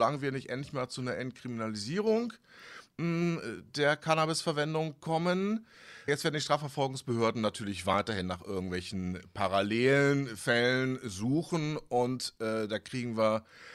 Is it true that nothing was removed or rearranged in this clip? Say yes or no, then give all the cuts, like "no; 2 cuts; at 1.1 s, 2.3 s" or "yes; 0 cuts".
no; 1 cut; at 6.1 s